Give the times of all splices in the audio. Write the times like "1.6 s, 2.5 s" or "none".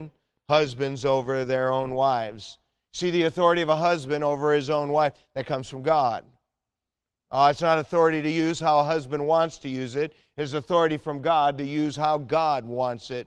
none